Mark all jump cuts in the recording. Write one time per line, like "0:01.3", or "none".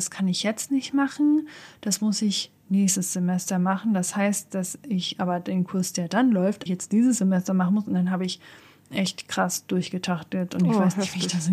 0:06.7